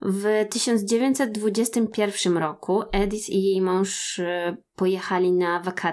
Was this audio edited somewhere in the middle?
no; 0 cuts

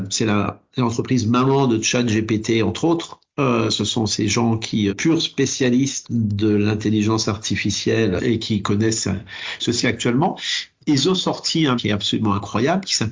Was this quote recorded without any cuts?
no; 5 cuts; at 4.9 s, 6.0 s, 8.2 s, 9.8 s, 11.8 s

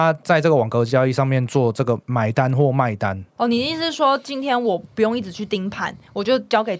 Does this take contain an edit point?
yes; 1 cut; at 3.3 s

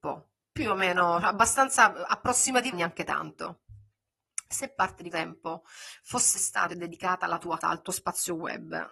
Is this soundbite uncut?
no; 4 cuts; at 2.7 s, 5.1 s, 6.7 s, 7.6 s

